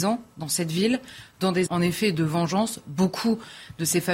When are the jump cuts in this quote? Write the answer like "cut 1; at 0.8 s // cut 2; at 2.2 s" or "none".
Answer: cut 1; at 1.7 s